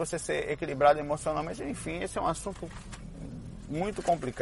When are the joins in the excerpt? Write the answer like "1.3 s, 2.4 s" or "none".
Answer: none